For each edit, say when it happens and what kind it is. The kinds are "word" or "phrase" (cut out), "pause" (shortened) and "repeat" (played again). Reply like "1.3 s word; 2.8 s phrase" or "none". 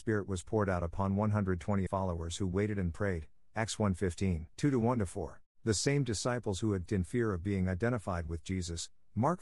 1.9 s phrase; 4.5 s pause; 5.5 s pause; 6.9 s word